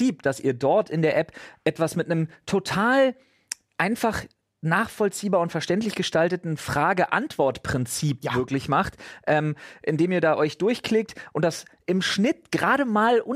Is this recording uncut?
yes; 0 cuts

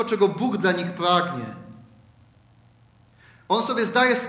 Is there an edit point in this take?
no; 0 cuts

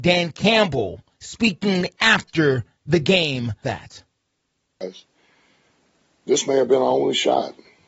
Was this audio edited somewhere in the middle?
yes; 1 cut; at 3.6 s

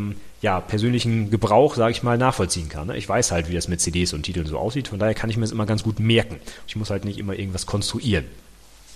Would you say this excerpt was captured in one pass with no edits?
yes; 0 cuts

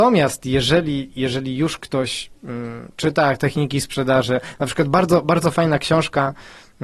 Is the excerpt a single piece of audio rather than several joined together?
yes; 0 cuts

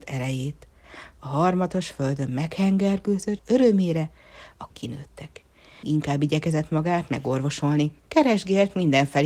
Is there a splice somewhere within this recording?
yes; 4 cuts; at 3.4 s, 4.7 s, 5.8 s, 8.0 s

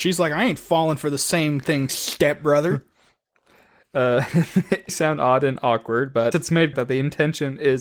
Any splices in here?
yes; 4 cuts; at 1.9 s, 4.9 s, 6.3 s, 6.7 s

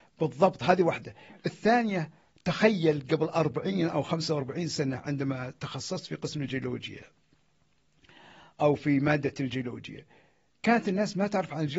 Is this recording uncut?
yes; 0 cuts

